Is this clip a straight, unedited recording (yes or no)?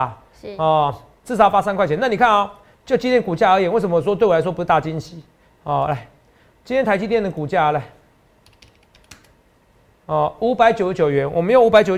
yes